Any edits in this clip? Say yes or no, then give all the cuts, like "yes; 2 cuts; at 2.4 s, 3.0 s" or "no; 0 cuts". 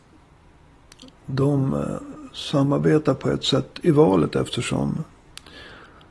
no; 0 cuts